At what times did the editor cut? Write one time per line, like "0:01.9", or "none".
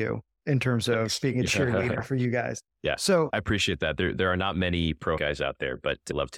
0:05.2